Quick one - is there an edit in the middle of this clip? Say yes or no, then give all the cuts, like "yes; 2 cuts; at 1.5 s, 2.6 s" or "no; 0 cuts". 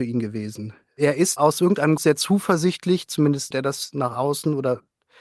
yes; 3 cuts; at 1.4 s, 2.0 s, 3.5 s